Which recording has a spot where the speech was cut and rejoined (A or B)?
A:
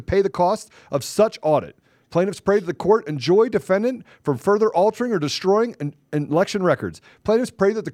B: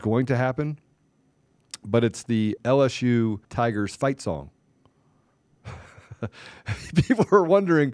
B